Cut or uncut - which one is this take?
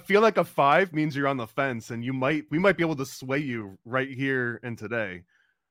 cut